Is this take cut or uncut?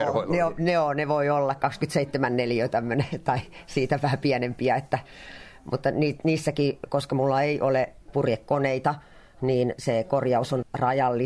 uncut